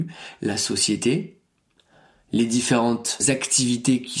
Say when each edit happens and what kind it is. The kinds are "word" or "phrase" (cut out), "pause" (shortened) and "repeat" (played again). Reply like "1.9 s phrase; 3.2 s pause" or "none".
none

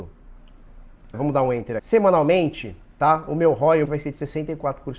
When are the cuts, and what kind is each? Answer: 1.1 s word; 1.8 s word; 3.8 s phrase

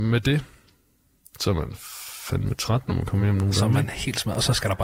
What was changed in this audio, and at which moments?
none

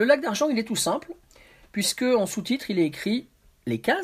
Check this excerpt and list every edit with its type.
none

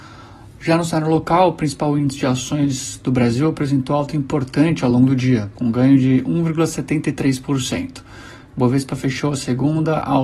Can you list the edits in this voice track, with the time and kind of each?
none

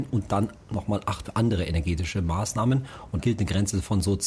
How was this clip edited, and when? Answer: 1.2 s word; 3.2 s word

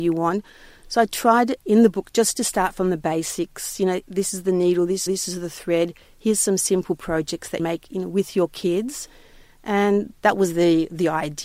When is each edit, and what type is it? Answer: 1.6 s pause; 5.1 s repeat; 7.6 s phrase

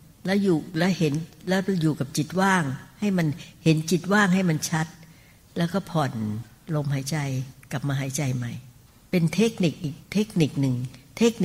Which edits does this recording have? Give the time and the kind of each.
8.9 s pause; 10.0 s pause

